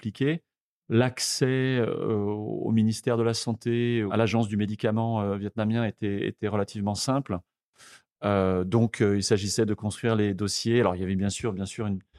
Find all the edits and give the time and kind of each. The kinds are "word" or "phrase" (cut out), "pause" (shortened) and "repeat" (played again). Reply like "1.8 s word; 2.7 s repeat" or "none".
none

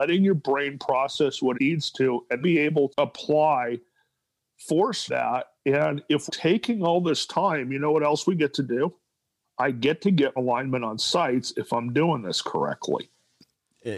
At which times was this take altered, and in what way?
1.5 s word; 2.4 s word; 2.9 s word; 5.1 s word; 6.3 s word; 10.4 s word

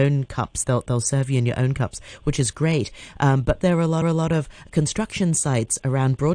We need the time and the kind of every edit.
3.6 s word; 4.0 s repeat

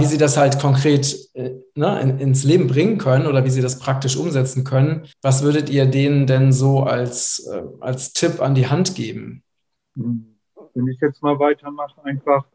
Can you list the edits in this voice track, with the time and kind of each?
5.1 s pause; 9.8 s pause

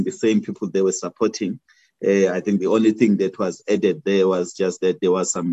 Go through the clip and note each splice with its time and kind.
none

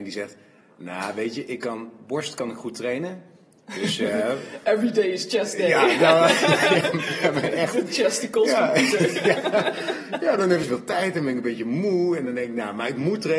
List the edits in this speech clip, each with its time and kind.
10.6 s word

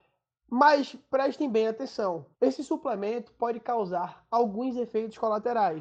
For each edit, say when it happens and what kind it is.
2.3 s pause

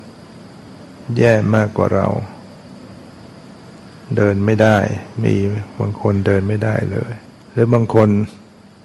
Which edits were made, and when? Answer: 7.4 s pause

